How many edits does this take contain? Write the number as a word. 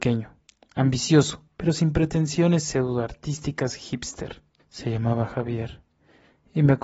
two